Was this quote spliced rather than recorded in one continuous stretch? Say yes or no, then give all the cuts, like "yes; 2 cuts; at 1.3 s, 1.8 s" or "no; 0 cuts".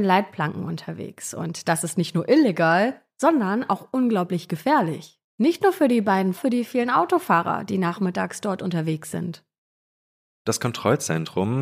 yes; 2 cuts; at 5.3 s, 6.4 s